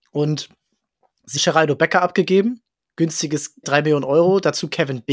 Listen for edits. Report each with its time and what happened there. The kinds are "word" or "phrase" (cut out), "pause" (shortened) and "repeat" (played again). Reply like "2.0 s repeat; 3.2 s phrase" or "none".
1.4 s word; 3.6 s word